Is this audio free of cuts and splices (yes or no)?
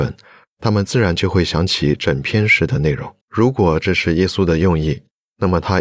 no